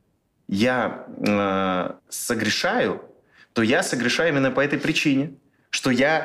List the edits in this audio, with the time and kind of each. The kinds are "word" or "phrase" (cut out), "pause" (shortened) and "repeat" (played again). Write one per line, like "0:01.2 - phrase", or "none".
0:02.0 - pause